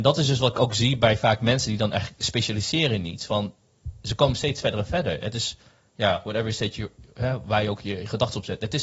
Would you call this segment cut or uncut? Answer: uncut